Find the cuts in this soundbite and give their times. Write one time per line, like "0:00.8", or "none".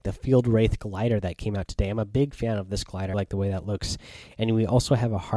0:03.1